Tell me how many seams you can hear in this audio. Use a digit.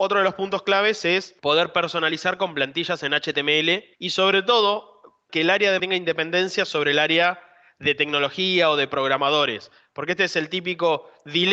4